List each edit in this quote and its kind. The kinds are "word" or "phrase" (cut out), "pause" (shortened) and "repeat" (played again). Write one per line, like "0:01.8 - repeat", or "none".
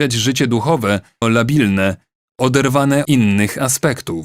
0:01.2 - word
0:03.0 - word